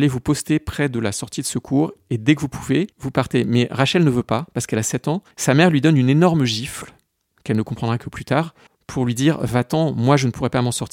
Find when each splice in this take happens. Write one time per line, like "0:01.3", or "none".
0:02.9
0:05.3
0:08.7